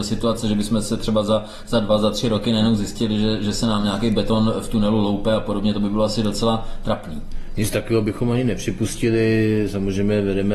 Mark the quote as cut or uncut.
uncut